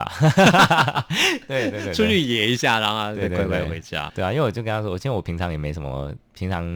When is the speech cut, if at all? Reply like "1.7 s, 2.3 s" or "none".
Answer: 4.1 s